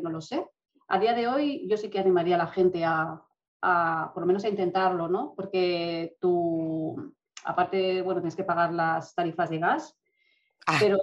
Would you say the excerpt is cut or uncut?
uncut